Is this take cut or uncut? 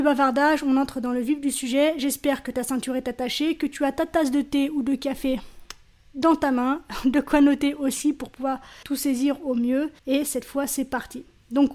cut